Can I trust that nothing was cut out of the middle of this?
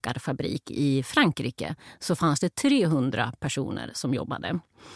yes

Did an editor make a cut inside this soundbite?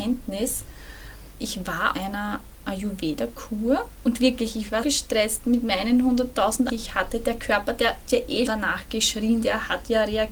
yes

